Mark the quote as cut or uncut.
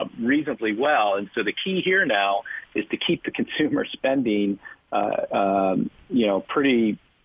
uncut